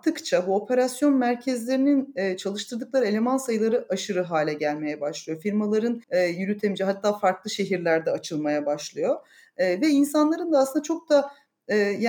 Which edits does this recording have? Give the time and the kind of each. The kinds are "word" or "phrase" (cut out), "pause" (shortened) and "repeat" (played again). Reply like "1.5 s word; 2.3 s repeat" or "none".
6.0 s pause